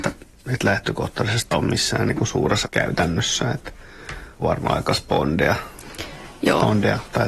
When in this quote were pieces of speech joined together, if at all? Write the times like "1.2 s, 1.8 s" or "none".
1.5 s, 2.6 s, 4.4 s